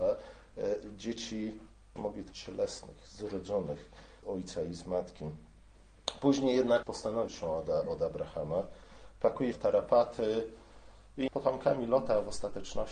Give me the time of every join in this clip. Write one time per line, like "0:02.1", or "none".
0:02.0
0:02.3
0:04.2
0:06.8
0:07.3
0:09.5
0:11.3